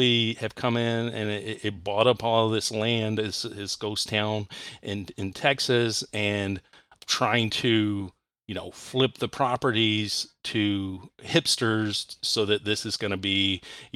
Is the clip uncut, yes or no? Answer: yes